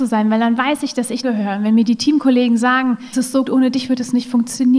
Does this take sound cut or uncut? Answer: cut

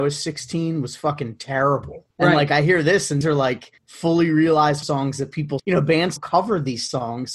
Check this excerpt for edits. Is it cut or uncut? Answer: cut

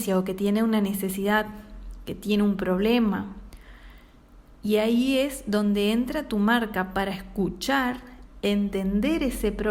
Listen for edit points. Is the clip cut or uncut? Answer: uncut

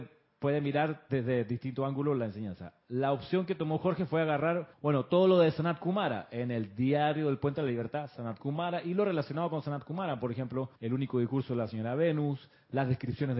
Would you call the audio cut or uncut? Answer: cut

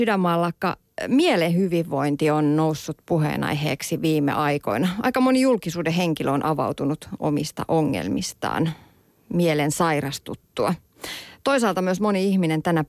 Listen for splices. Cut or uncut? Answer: uncut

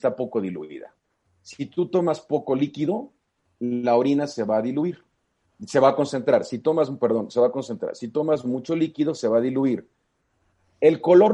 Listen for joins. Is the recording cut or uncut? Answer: uncut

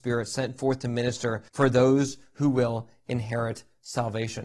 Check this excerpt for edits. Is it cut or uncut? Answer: cut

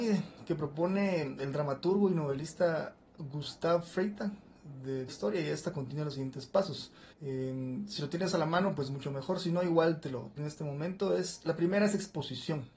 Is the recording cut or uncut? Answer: cut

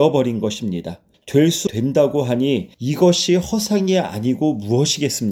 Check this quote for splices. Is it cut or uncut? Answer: cut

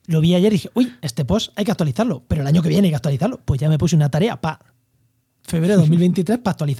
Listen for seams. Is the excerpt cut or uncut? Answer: uncut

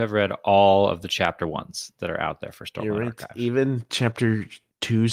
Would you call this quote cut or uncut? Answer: uncut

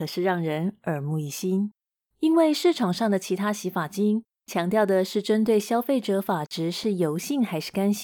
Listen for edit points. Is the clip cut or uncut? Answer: uncut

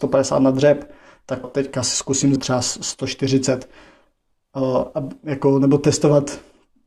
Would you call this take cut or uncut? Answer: cut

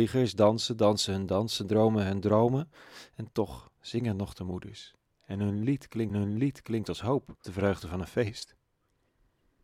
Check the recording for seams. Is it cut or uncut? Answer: cut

